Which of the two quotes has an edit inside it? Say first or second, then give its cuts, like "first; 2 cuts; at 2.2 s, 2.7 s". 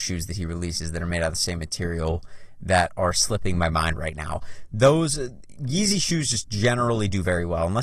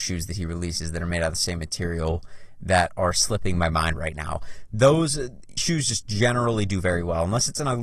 second; 1 cut; at 5.6 s